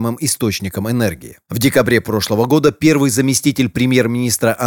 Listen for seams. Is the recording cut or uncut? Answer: uncut